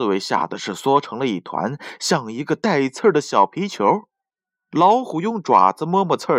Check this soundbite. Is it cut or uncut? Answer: uncut